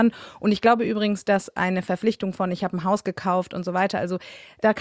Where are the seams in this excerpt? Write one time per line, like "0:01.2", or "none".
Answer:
none